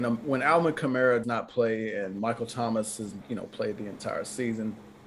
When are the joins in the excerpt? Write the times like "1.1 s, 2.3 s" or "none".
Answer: 1.2 s, 3.2 s